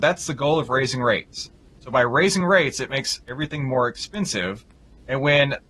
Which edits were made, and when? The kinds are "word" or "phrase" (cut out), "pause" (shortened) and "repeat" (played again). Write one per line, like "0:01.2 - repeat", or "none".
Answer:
none